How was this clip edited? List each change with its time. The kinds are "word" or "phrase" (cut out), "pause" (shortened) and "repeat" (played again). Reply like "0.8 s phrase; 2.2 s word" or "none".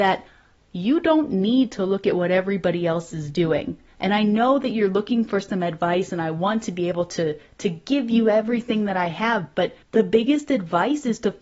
9.8 s pause